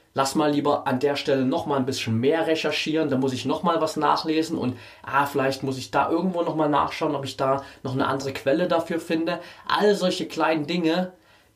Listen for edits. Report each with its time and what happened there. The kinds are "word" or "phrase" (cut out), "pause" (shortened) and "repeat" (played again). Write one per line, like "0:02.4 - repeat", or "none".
none

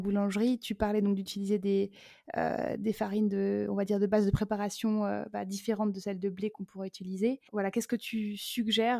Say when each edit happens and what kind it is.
0:07.5 - pause

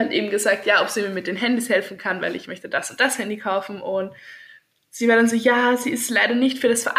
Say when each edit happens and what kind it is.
none

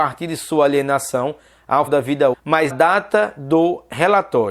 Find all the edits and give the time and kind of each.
0:01.9 - word
0:02.3 - word
0:02.7 - word

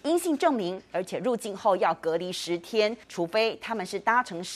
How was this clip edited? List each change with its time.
0:03.0 - pause

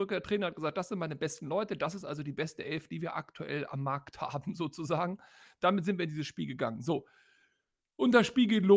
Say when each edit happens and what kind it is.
none

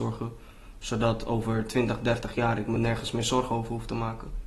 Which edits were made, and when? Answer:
none

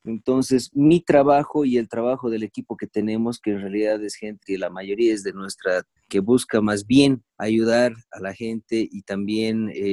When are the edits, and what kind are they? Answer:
0:04.4 - word
0:06.0 - phrase
0:07.3 - pause

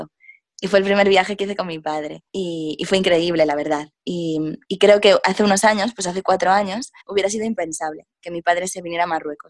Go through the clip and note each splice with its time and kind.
0:02.3 - pause
0:04.6 - pause
0:07.0 - pause

